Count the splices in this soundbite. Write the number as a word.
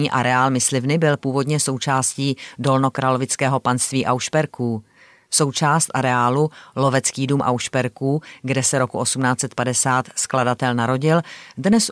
zero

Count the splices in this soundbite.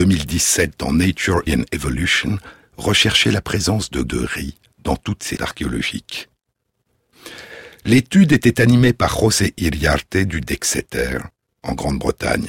four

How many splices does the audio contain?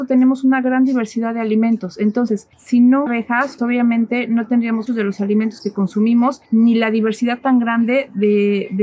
five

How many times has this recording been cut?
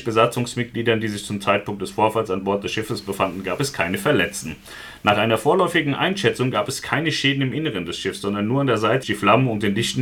one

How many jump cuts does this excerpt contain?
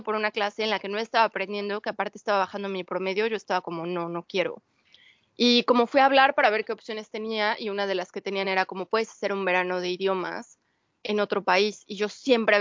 zero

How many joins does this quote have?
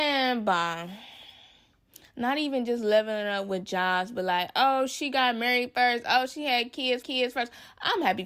one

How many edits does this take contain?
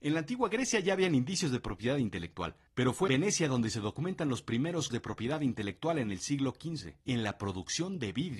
four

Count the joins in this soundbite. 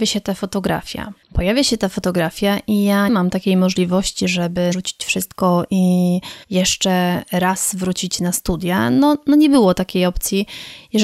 four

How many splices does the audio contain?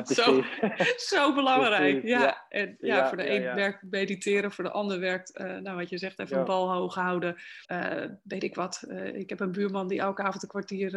one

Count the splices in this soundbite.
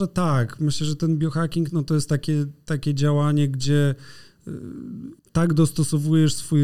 one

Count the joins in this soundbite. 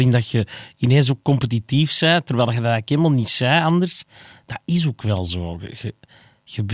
zero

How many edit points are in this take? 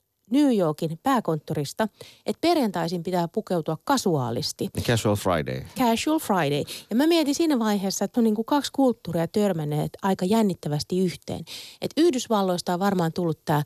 one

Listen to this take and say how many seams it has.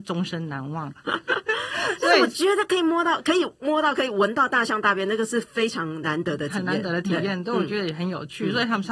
zero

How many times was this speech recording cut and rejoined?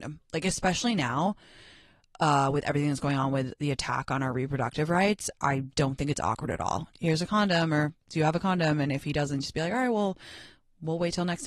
one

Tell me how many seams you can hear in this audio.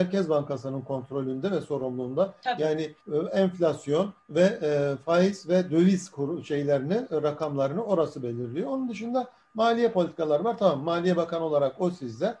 two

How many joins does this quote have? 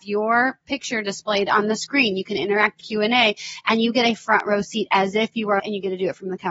two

